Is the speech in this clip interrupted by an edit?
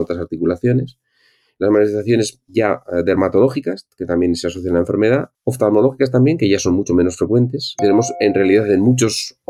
yes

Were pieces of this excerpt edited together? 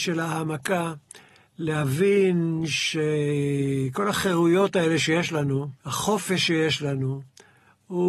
yes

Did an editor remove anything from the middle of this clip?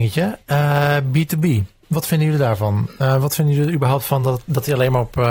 no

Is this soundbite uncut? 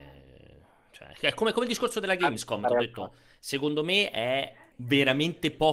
no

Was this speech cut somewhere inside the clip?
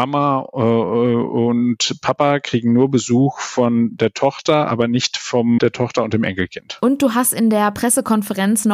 no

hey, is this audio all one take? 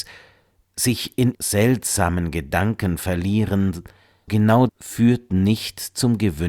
no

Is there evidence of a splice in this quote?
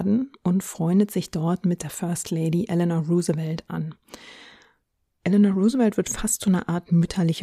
no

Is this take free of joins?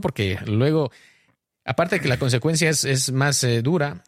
yes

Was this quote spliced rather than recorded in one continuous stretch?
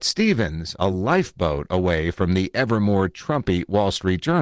no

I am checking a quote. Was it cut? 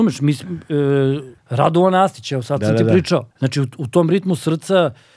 yes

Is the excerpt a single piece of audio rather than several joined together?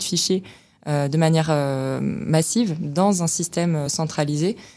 yes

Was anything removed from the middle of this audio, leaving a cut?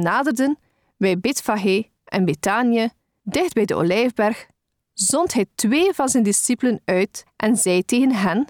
no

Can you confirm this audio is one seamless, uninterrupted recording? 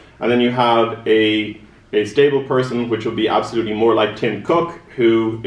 yes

